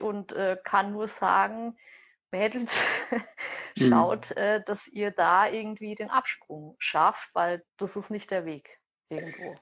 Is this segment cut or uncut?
cut